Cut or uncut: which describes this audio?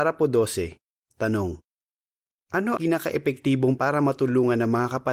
cut